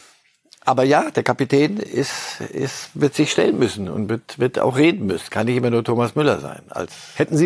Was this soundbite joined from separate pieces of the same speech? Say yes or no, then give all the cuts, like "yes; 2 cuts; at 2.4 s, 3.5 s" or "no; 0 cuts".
no; 0 cuts